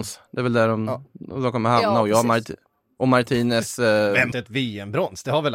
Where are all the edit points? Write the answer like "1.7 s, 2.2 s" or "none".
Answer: 4.3 s